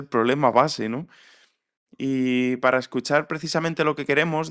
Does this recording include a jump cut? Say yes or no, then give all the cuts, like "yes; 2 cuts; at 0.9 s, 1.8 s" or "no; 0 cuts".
no; 0 cuts